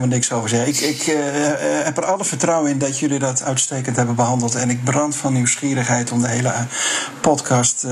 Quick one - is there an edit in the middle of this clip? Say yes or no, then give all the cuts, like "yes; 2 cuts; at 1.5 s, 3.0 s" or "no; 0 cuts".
no; 0 cuts